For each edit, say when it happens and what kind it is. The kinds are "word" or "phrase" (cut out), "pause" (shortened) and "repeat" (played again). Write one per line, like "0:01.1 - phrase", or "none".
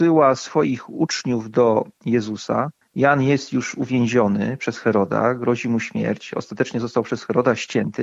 0:01.9 - pause